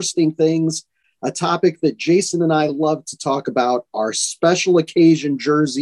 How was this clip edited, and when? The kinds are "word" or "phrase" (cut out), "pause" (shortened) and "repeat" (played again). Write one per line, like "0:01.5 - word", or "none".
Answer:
none